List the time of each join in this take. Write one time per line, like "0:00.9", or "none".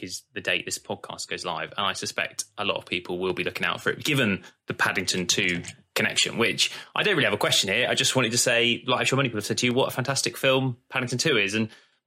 none